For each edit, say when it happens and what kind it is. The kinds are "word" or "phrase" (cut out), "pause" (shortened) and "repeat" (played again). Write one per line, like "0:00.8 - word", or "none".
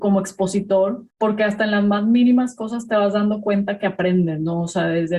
none